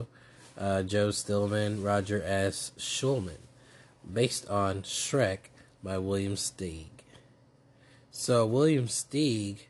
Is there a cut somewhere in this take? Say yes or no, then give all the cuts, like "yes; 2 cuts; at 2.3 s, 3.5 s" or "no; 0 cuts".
no; 0 cuts